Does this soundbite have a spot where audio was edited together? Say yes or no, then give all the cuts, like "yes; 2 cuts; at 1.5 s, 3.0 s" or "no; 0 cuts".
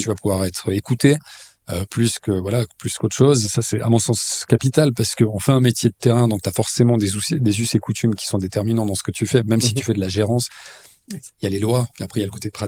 no; 0 cuts